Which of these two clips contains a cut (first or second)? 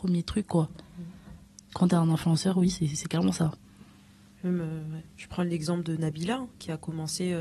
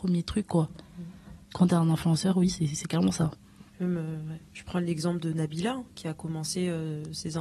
second